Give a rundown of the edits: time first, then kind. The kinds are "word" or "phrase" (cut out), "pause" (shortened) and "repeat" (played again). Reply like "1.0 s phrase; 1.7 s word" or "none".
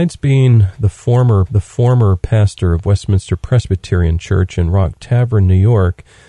1.5 s repeat